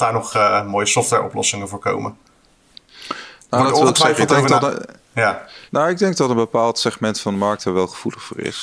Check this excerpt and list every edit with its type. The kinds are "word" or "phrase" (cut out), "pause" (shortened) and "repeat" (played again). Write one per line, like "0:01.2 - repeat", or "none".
0:05.7 - pause